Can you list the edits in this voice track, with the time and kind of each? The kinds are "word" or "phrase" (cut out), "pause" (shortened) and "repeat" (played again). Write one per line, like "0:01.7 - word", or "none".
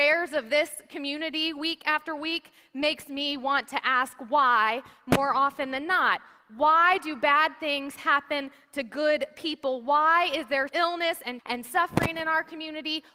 0:10.7 - word
0:11.4 - word